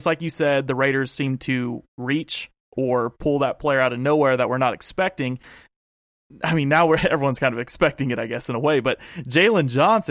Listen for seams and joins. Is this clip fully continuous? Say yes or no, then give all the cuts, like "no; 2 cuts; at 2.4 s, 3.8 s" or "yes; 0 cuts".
no; 1 cut; at 1.9 s